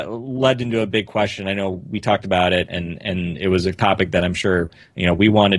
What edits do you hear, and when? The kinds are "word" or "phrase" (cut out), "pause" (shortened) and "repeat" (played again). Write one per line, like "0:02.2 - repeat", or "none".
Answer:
none